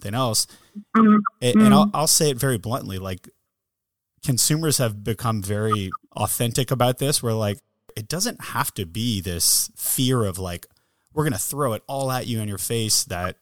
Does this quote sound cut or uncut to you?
cut